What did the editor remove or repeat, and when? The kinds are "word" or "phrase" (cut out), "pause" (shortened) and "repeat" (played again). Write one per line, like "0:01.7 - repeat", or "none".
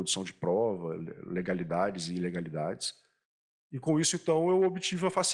0:03.2 - pause